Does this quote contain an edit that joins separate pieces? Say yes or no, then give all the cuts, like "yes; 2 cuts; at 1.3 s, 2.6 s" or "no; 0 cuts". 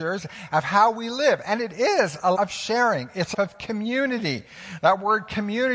yes; 2 cuts; at 2.3 s, 3.3 s